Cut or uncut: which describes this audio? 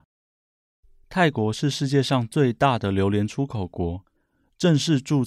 uncut